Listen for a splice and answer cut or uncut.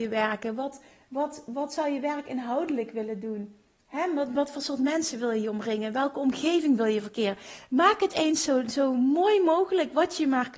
uncut